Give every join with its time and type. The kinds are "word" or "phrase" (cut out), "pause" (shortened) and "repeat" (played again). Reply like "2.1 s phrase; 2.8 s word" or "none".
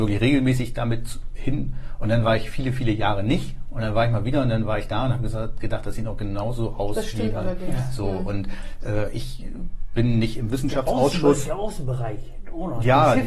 none